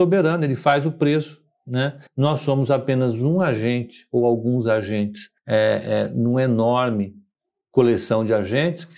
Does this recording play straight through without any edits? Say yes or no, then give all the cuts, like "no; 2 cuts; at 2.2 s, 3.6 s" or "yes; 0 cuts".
no; 3 cuts; at 2.1 s, 5.4 s, 7.3 s